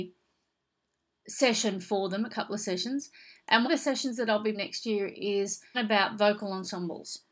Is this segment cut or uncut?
cut